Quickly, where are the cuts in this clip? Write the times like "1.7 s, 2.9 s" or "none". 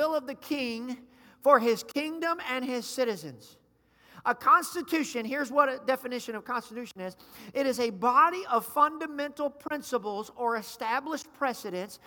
none